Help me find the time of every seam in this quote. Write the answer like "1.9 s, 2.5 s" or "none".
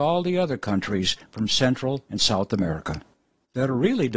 none

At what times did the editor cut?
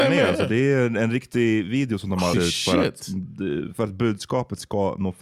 2.3 s

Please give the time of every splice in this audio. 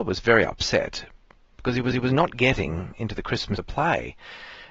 1.9 s, 3.6 s

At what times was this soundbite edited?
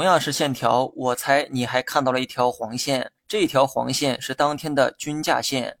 3.2 s

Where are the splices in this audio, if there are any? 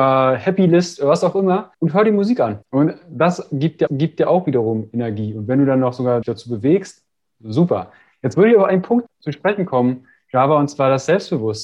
1.7 s, 2.6 s, 3.9 s, 6.2 s, 9.1 s

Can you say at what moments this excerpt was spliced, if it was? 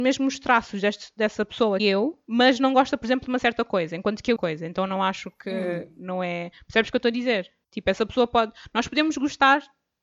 1.8 s, 4.4 s

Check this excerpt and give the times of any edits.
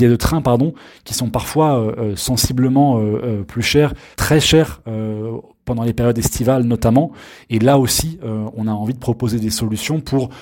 4.1 s

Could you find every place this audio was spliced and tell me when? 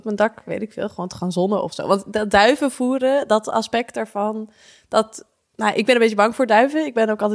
none

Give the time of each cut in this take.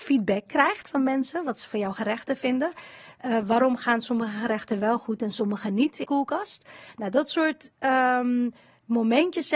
6.0 s

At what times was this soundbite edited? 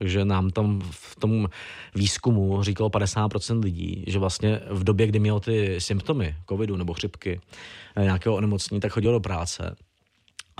none

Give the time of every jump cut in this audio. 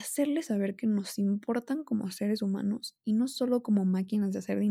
none

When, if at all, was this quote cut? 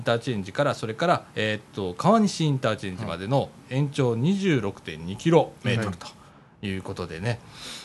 1.3 s

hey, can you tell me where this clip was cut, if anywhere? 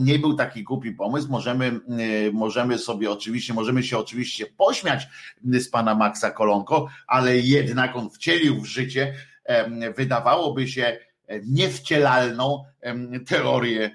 none

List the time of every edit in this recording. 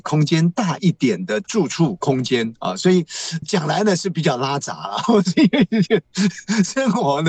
3.4 s

